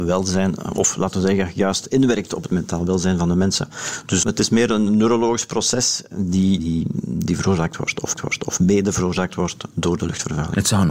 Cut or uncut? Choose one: cut